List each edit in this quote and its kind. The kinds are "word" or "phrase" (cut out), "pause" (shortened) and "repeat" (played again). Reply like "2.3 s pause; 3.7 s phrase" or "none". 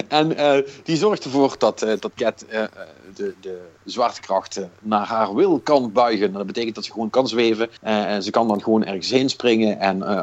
7.8 s pause